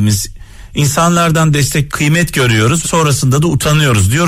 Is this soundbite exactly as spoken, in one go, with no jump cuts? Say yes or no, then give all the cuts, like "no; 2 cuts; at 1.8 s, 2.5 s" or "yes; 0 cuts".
no; 2 cuts; at 1.9 s, 2.8 s